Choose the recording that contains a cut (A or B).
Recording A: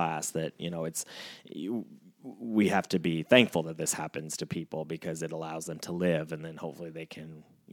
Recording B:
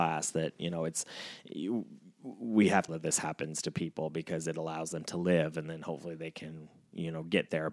B